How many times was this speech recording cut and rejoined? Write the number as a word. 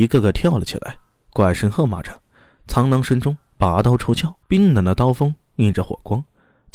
one